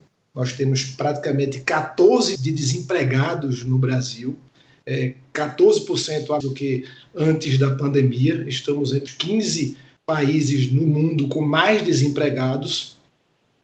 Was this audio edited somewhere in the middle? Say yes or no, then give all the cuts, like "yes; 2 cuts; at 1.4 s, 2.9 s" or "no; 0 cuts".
yes; 3 cuts; at 2.4 s, 6.4 s, 9.1 s